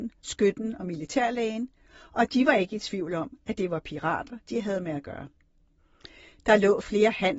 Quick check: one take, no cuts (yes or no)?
yes